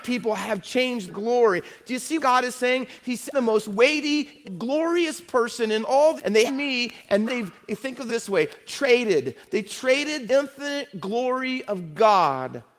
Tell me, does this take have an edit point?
yes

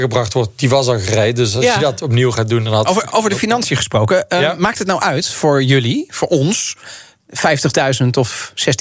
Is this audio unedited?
yes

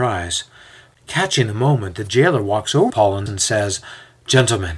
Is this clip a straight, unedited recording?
no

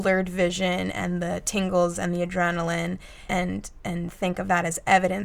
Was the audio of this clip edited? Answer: yes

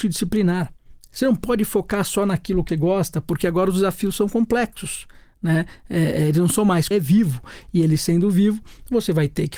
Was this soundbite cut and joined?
yes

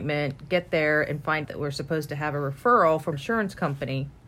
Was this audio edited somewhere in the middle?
yes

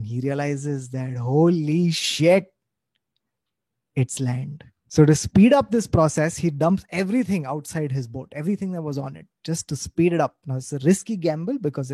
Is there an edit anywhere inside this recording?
no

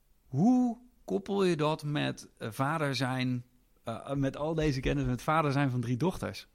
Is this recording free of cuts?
yes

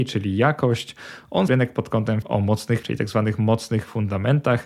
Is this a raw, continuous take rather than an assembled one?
no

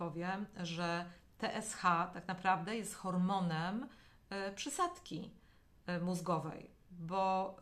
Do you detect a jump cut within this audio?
no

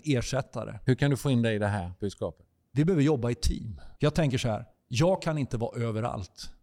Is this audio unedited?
no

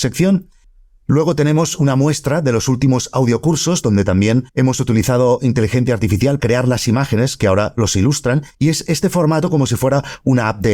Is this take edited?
yes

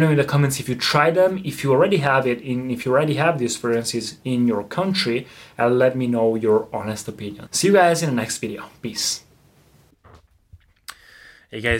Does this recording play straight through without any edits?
no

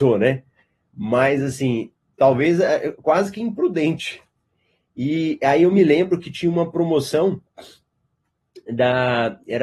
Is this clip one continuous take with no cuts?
yes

